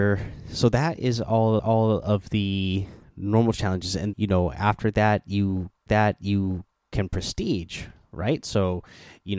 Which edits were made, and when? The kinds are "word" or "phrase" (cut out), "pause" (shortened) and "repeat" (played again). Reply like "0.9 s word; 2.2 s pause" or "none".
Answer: 1.6 s repeat; 4.1 s word; 5.9 s repeat